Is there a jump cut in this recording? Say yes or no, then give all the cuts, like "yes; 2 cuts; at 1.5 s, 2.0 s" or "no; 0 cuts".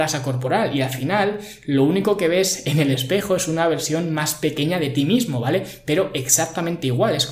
no; 0 cuts